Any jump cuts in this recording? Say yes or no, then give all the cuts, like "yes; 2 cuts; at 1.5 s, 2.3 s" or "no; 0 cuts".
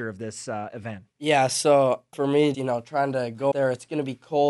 yes; 4 cuts; at 1.1 s, 2.1 s, 2.5 s, 3.5 s